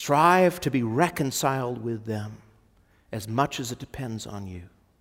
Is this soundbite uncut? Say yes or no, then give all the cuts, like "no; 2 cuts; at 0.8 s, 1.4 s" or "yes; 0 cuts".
yes; 0 cuts